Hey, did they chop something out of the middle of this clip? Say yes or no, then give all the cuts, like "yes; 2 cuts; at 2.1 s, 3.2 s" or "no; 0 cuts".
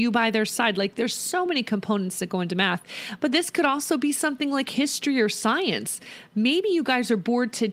no; 0 cuts